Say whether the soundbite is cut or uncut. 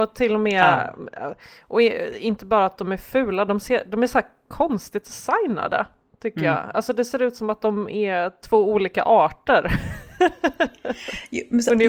uncut